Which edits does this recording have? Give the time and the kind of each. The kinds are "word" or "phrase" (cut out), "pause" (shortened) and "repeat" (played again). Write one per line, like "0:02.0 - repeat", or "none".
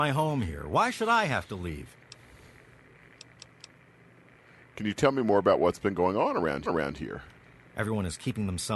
0:06.7 - repeat